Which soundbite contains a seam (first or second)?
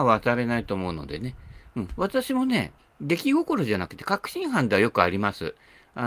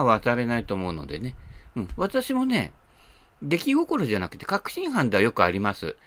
first